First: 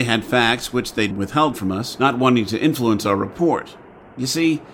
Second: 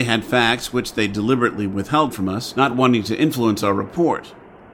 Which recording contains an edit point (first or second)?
first